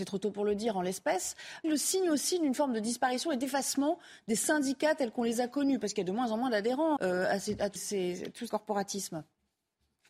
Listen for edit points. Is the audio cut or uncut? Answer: cut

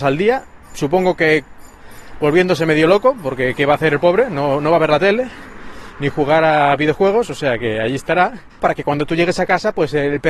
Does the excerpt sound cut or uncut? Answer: cut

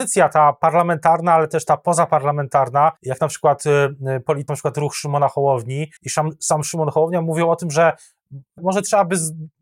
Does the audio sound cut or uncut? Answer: cut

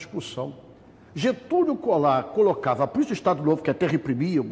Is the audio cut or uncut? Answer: uncut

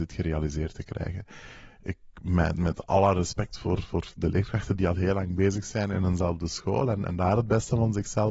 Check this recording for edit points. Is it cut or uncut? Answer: uncut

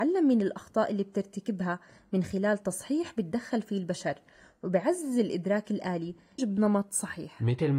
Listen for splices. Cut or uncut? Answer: cut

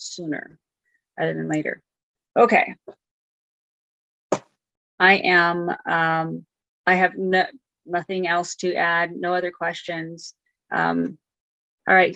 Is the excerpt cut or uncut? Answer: uncut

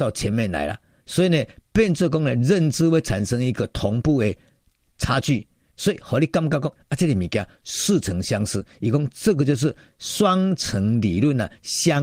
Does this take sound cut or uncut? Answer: cut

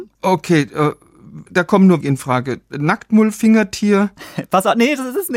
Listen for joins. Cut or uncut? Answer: cut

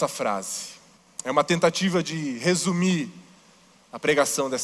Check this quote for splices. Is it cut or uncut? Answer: cut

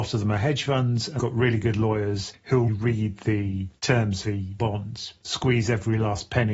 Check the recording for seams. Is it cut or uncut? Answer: cut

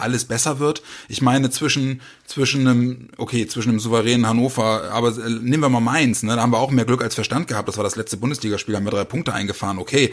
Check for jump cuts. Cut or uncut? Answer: uncut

